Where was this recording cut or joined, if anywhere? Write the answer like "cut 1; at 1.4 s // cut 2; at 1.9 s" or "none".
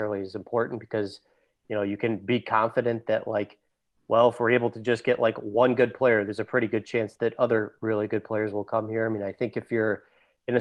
none